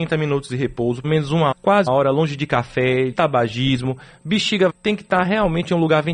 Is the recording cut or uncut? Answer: cut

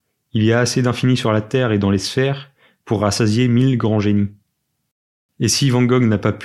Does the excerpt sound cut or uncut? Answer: uncut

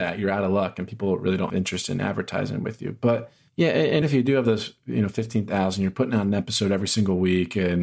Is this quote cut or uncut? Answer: cut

